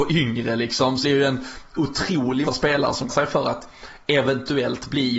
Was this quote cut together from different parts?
yes; 3 cuts; at 1.0 s, 2.5 s, 3.1 s

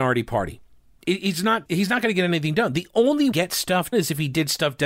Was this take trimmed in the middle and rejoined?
yes; 3 cuts; at 1.7 s, 3.3 s, 3.9 s

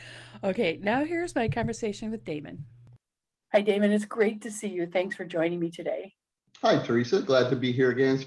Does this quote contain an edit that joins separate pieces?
no; 0 cuts

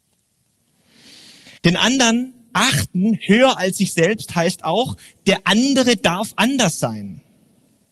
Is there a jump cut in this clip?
yes; 1 cut; at 1.6 s

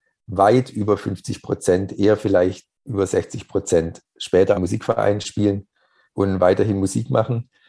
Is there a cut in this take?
yes; 3 cuts; at 2.7 s, 4.5 s, 6.1 s

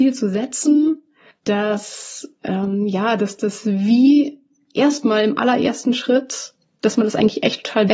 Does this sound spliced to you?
no; 0 cuts

